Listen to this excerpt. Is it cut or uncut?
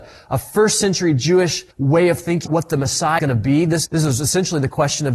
cut